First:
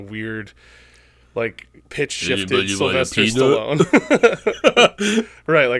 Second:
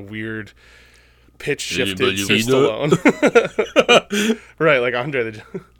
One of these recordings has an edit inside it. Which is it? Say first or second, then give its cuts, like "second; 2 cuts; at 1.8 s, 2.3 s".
second; 2 cuts; at 1.3 s, 2.3 s